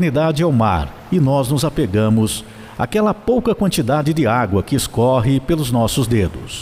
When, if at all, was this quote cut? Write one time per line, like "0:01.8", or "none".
none